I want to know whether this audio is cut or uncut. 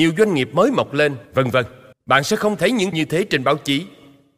cut